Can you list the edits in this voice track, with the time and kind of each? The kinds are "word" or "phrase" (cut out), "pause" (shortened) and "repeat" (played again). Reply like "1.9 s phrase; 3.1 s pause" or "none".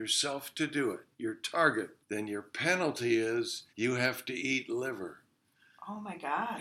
1.1 s pause; 2.0 s pause; 3.7 s pause